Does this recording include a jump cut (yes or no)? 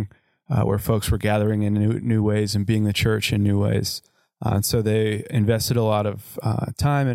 no